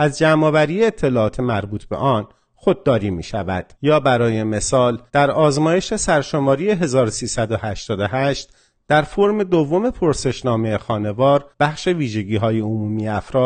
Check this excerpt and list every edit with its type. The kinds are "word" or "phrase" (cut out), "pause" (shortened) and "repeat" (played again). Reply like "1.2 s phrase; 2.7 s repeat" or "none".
3.7 s pause; 5.1 s pause; 11.5 s pause

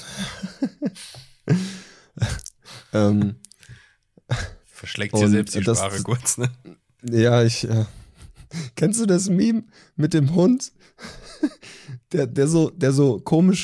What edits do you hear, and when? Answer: none

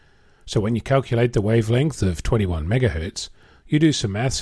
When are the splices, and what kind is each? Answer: none

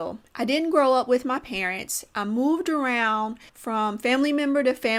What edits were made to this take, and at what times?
3.5 s pause

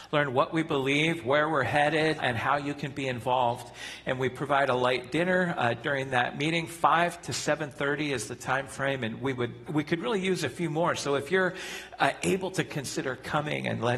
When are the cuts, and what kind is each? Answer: 2.2 s word; 9.7 s word; 12.7 s phrase

